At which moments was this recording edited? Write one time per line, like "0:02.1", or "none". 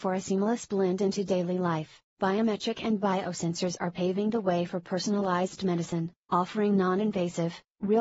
0:02.1